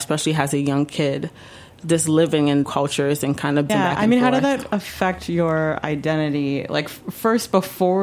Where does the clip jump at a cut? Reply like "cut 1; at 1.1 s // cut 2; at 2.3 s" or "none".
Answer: cut 1; at 2.6 s // cut 2; at 3.7 s